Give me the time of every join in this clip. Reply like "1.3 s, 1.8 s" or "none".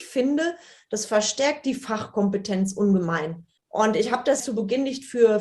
3.6 s, 4.4 s